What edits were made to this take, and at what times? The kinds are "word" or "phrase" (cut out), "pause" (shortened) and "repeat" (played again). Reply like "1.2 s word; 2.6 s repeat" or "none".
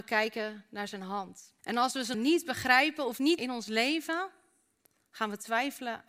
1.6 s pause; 2.1 s word; 3.4 s phrase